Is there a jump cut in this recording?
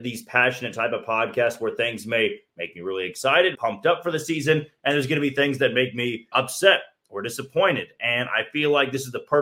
yes; 2 cuts; at 3.5 s, 6.3 s

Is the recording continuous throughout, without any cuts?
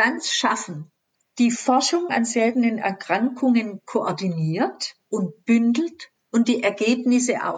no; 3 cuts; at 1.1 s, 5.0 s, 6.2 s

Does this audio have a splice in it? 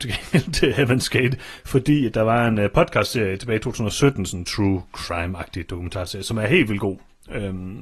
no; 0 cuts

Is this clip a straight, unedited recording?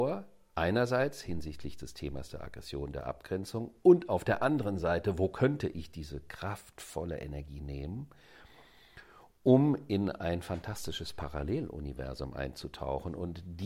yes; 0 cuts

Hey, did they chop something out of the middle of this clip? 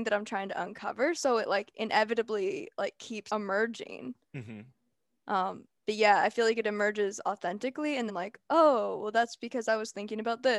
yes; 3 cuts; at 3.3 s, 5.8 s, 8.1 s

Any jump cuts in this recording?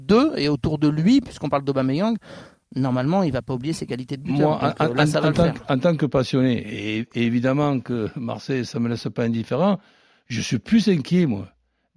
no; 0 cuts

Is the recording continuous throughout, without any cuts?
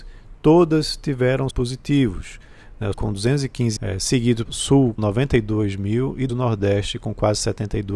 no; 6 cuts; at 1.5 s, 2.9 s, 3.8 s, 4.5 s, 5.0 s, 6.3 s

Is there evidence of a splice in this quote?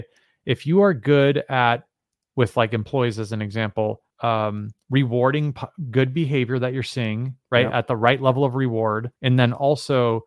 yes; 2 cuts; at 4.1 s, 9.2 s

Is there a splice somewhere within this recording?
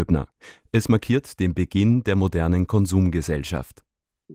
no; 0 cuts

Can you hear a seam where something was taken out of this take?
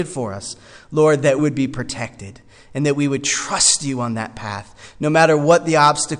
yes; 1 cut; at 1.4 s

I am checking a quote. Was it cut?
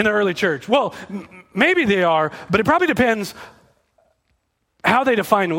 no; 0 cuts

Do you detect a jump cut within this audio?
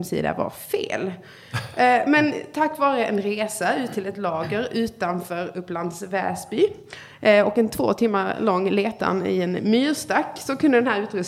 no; 0 cuts

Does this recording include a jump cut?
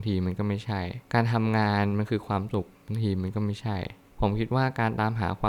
yes; 1 cut; at 1.0 s

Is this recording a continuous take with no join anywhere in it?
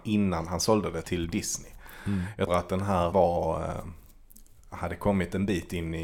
no; 3 cuts; at 1.0 s, 2.5 s, 3.1 s

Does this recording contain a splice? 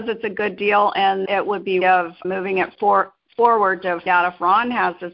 yes; 5 cuts; at 1.3 s, 1.8 s, 2.2 s, 2.7 s, 4.1 s

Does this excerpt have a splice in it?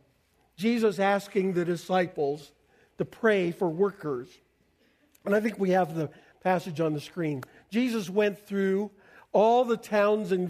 no; 0 cuts

